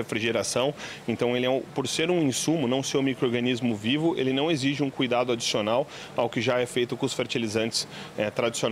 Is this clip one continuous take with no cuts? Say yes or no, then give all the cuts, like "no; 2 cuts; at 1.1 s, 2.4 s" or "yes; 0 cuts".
yes; 0 cuts